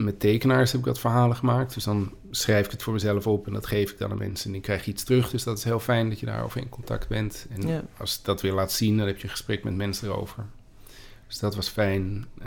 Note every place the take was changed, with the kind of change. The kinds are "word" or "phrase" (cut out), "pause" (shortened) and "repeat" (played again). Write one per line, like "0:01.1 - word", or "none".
none

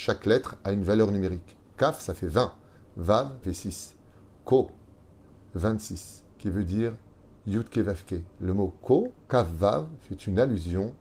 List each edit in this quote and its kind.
0:03.4 - word
0:06.3 - pause
0:08.3 - pause
0:09.2 - pause

